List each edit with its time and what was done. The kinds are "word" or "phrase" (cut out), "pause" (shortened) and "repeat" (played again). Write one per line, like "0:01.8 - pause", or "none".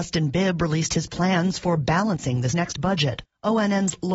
0:02.5 - word